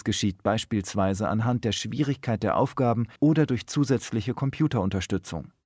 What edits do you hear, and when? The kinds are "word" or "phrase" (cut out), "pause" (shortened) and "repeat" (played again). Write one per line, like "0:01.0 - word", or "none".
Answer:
0:03.2 - pause

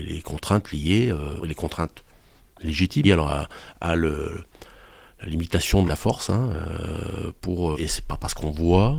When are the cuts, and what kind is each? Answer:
0:01.4 - word
0:03.0 - word
0:05.9 - word
0:07.7 - word

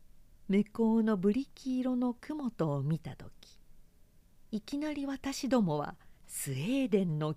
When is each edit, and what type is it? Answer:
0:06.2 - pause

